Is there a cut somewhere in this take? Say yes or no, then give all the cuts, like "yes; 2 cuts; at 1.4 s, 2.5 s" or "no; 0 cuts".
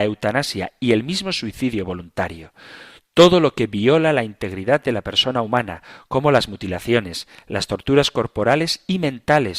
no; 0 cuts